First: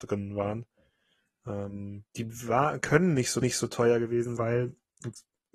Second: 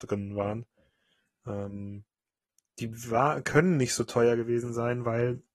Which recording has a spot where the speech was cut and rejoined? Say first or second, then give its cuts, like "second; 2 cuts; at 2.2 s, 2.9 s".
first; 3 cuts; at 2.1 s, 3.4 s, 4.4 s